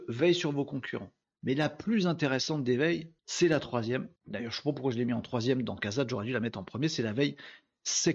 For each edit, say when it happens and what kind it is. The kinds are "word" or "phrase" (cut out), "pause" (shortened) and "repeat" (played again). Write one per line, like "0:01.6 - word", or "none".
0:01.2 - pause
0:03.2 - pause
0:04.2 - pause